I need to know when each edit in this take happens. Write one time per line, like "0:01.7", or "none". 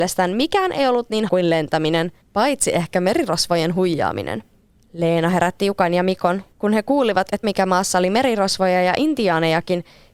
0:01.3
0:02.2
0:04.7
0:06.5
0:07.4